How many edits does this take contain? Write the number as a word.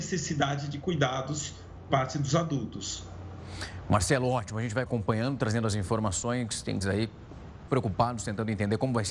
four